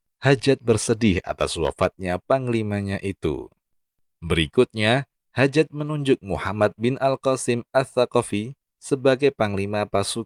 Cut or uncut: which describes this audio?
uncut